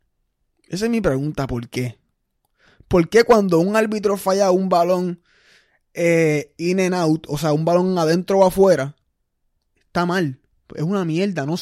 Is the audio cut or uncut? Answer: uncut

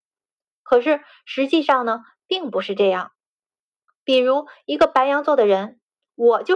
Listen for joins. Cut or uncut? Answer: uncut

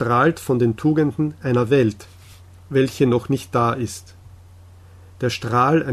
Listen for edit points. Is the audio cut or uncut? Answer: uncut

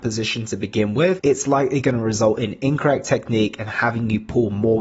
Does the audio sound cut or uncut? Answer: uncut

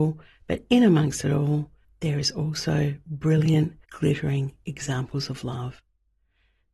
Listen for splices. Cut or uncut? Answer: cut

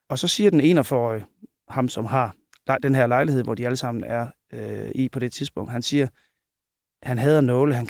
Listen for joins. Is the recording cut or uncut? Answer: uncut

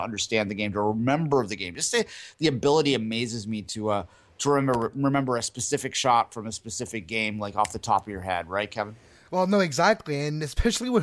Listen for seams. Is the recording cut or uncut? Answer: uncut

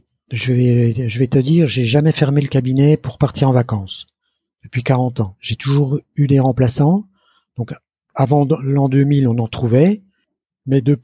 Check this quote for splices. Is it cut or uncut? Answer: uncut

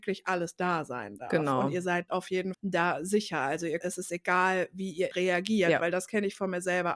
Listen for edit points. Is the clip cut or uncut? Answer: cut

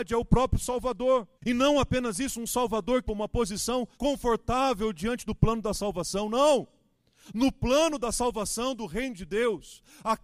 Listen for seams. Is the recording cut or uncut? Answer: cut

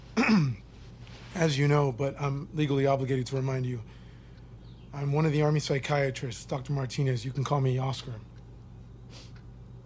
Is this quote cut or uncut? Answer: uncut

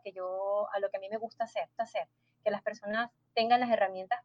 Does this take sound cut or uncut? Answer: cut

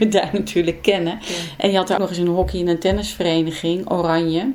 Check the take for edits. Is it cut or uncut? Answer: cut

